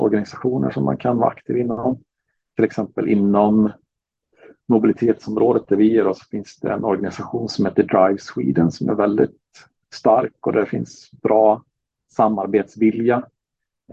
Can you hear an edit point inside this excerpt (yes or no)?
no